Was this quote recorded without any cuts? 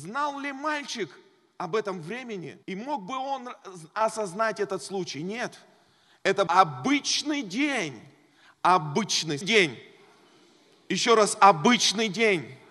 no; 3 cuts; at 2.6 s, 6.5 s, 9.4 s

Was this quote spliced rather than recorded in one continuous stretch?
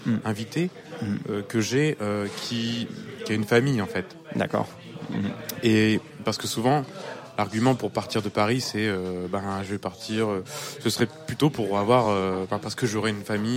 no; 0 cuts

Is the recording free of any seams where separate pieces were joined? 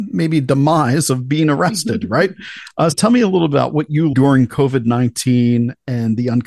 no; 2 cuts; at 2.9 s, 4.1 s

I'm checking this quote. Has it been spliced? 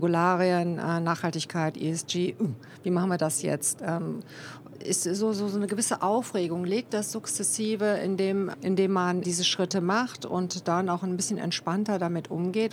yes; 4 cuts; at 4.7 s, 6.9 s, 8.5 s, 9.2 s

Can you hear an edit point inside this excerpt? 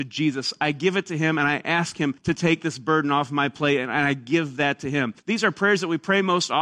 yes; 2 cuts; at 2.2 s, 5.2 s

